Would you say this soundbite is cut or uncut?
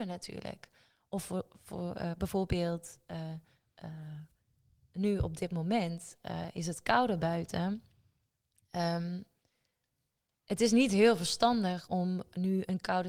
uncut